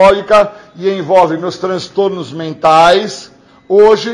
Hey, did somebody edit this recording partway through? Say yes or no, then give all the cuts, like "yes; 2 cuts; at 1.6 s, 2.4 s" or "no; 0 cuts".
no; 0 cuts